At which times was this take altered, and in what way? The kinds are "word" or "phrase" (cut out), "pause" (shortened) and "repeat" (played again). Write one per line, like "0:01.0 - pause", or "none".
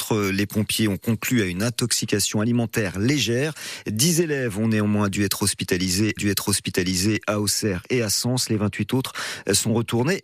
0:06.2 - repeat